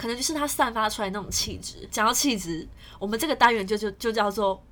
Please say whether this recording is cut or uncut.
cut